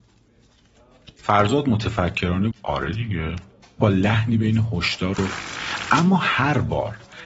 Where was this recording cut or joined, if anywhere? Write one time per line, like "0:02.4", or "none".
0:02.5
0:03.8
0:05.1